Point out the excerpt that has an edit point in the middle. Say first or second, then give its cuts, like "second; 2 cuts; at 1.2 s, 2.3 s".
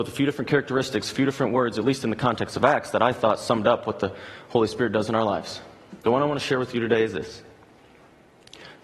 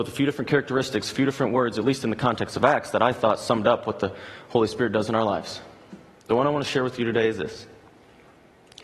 first; 1 cut; at 6.0 s